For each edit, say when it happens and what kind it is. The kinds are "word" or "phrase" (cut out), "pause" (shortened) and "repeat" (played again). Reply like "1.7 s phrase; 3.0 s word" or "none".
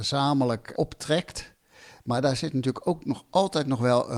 none

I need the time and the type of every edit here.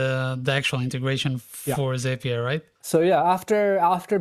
2.7 s pause

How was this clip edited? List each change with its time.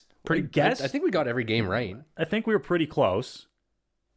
none

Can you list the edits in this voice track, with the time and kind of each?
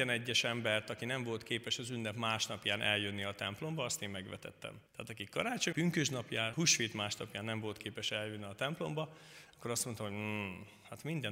4.9 s pause; 5.7 s word; 6.5 s word

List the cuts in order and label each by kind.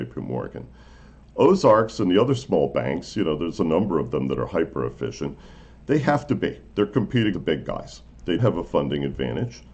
7.3 s word; 8.4 s word

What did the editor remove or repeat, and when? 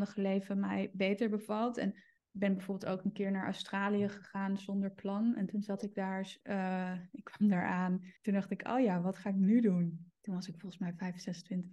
2.2 s pause; 6.4 s pause; 8.2 s pause; 10.2 s pause

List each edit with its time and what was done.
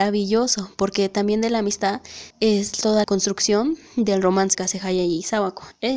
2.3 s pause; 3.0 s word; 4.5 s word

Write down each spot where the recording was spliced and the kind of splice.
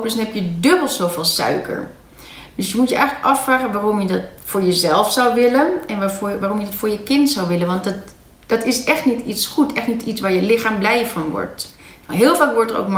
none

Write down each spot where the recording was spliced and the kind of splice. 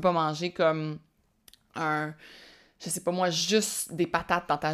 none

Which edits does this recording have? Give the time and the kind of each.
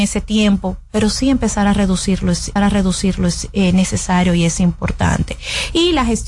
2.6 s repeat

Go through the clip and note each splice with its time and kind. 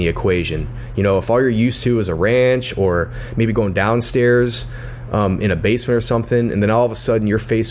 none

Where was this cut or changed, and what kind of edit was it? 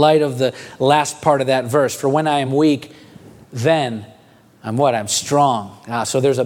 none

